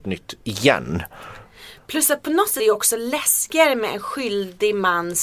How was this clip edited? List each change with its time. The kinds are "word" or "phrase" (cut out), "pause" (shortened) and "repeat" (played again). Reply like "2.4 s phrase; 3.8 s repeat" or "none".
2.6 s word